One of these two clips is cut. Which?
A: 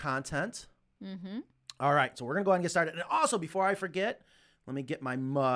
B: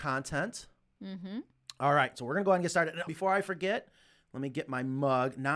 B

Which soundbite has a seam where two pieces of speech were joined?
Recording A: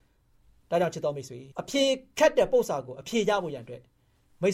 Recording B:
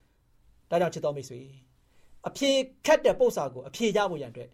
A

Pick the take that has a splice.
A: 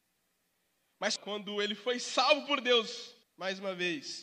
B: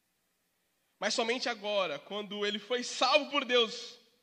A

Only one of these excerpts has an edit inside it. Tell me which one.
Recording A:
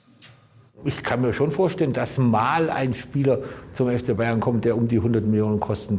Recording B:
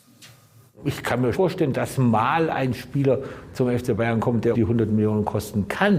B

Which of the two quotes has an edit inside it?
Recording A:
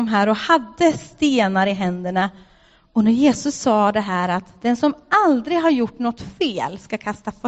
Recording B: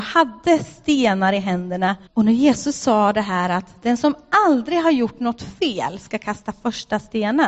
B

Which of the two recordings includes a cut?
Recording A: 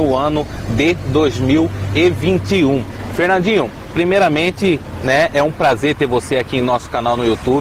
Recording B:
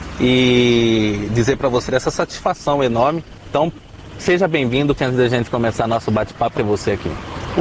B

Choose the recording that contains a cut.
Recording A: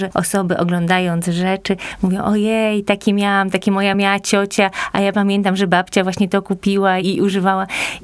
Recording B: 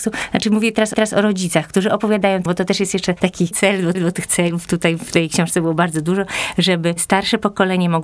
B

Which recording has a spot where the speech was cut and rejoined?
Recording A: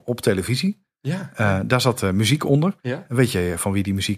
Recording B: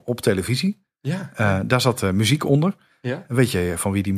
A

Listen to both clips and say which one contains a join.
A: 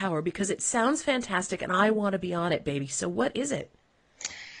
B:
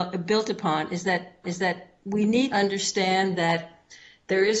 B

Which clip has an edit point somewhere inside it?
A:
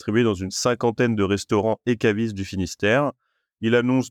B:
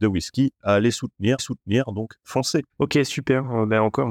B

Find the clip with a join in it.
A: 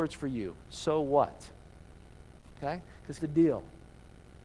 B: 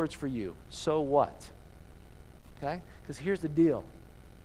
A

